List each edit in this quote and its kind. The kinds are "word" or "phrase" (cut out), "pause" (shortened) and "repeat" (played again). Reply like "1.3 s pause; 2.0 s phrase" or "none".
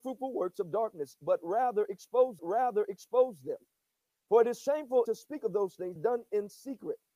2.4 s repeat; 5.0 s word; 6.0 s phrase